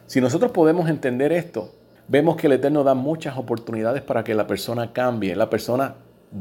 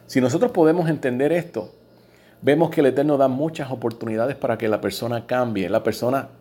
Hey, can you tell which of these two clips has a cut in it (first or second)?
first